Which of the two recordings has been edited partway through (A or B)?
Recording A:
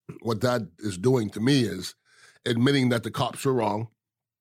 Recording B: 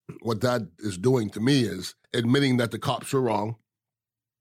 B